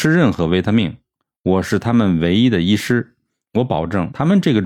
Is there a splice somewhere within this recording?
no; 0 cuts

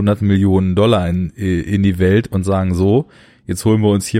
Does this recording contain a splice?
no; 0 cuts

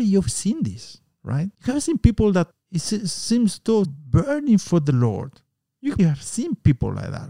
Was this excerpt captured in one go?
no; 4 cuts; at 1.5 s, 2.5 s, 3.8 s, 6.0 s

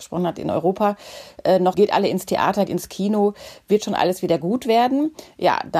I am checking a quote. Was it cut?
yes; 2 cuts; at 1.7 s, 2.7 s

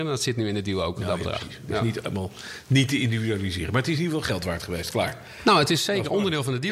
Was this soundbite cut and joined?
no; 0 cuts

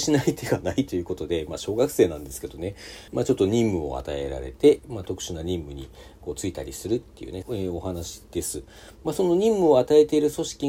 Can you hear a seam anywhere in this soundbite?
yes; 2 cuts; at 3.1 s, 7.4 s

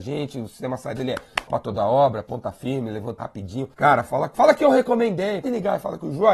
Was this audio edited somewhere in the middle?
yes; 6 cuts; at 1.0 s, 1.5 s, 3.2 s, 3.7 s, 4.3 s, 5.4 s

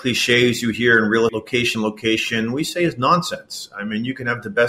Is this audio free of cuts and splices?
no; 2 cuts; at 1.3 s, 1.7 s

